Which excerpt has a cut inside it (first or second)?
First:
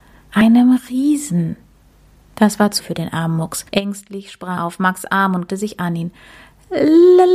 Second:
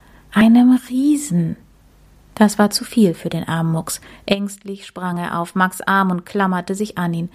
first